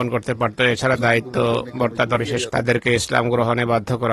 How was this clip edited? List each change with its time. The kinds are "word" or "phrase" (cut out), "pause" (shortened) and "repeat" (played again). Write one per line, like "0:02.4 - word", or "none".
0:01.0 - phrase
0:02.2 - word
0:02.5 - word